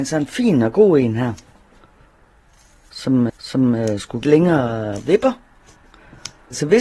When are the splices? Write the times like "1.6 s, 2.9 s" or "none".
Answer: 3.3 s, 4.2 s